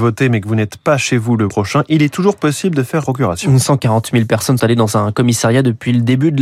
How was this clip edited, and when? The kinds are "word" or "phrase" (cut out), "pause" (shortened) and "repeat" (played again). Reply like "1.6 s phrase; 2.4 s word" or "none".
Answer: 1.5 s word; 3.0 s word; 4.6 s word